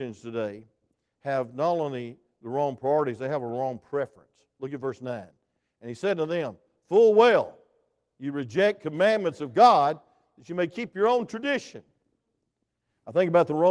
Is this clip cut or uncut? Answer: uncut